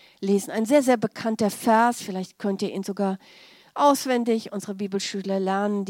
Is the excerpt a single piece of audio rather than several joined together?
yes; 0 cuts

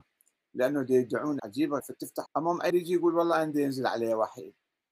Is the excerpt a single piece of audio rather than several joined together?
no; 4 cuts; at 1.4 s, 1.8 s, 2.3 s, 2.7 s

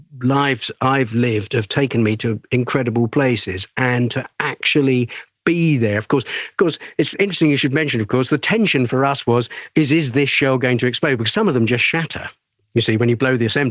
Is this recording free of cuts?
yes; 0 cuts

